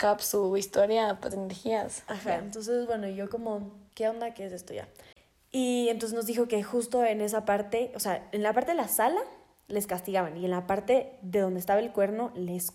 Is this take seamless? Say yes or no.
no